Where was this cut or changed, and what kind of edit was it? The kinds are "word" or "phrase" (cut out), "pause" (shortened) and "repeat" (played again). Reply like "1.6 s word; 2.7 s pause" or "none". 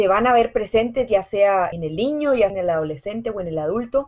2.5 s word